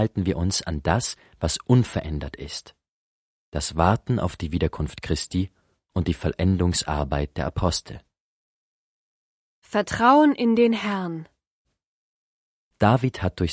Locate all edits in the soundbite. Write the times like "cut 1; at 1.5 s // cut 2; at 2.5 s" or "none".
none